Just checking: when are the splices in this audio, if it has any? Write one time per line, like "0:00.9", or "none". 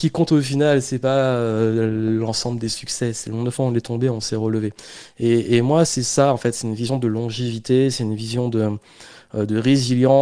none

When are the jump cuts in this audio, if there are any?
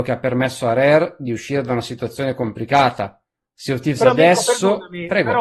0:03.4

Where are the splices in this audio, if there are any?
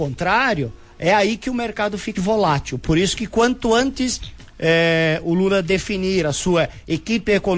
0:02.1

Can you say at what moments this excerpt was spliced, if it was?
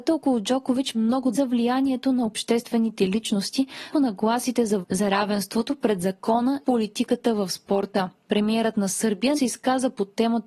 0:00.9
0:01.3
0:03.9
0:04.8
0:06.6
0:09.3

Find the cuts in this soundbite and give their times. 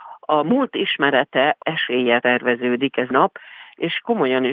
0:01.6
0:02.2
0:03.1

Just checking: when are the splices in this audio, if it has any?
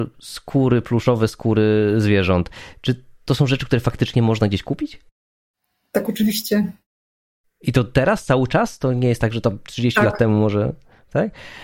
none

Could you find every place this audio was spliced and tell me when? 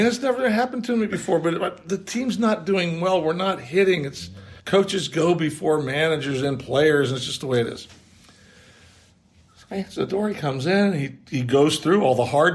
0:04.6

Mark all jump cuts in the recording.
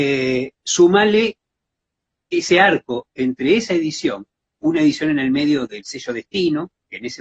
none

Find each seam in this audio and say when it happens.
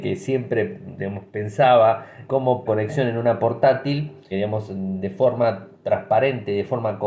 0:02.3
0:02.7
0:04.3

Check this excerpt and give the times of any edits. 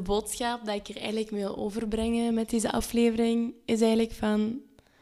none

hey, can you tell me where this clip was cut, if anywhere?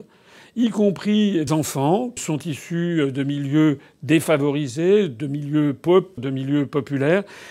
0:01.5
0:02.2
0:06.2

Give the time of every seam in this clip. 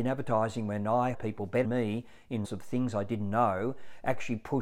0:01.1
0:01.6
0:02.4

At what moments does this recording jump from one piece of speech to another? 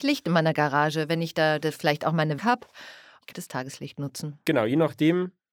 0:02.4
0:03.3

